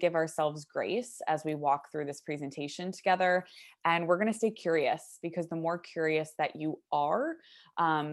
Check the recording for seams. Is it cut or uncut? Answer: uncut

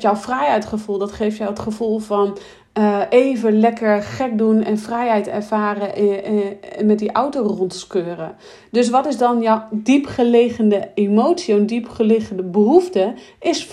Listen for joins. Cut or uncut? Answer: uncut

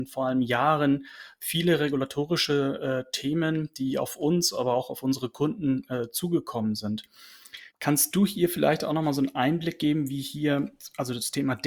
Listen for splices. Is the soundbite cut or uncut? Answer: cut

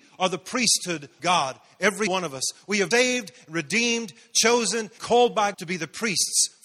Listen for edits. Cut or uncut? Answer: cut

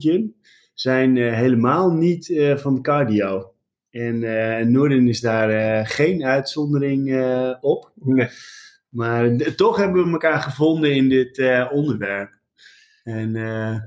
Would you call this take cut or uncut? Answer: uncut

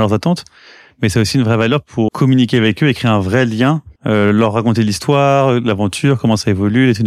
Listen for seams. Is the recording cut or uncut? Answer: cut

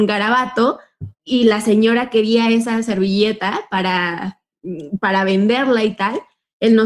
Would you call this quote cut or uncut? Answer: cut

